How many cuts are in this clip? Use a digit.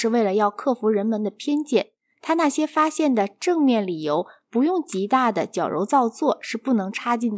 0